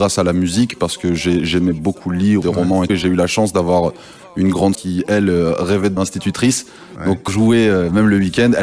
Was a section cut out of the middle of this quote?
yes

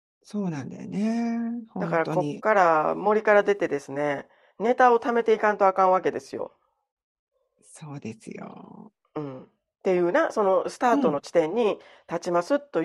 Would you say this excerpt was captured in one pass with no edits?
yes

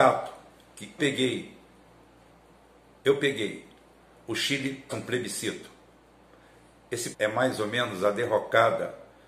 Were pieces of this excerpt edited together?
yes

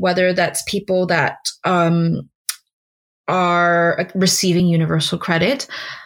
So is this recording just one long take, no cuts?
yes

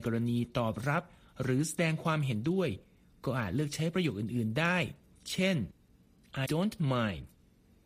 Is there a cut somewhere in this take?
yes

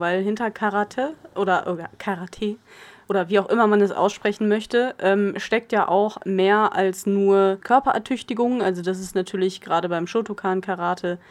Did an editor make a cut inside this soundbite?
no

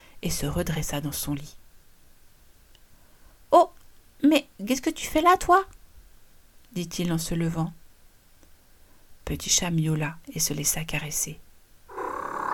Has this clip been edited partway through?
no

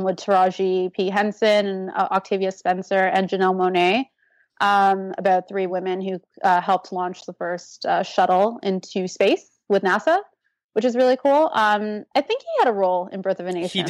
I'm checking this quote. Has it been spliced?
no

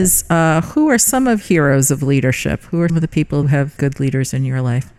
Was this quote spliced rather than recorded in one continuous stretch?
yes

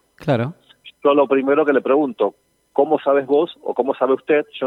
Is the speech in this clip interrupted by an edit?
no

